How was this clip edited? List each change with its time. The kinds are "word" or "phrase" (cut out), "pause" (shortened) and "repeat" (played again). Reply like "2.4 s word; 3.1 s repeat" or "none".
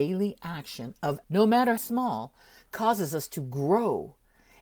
1.2 s word; 1.8 s word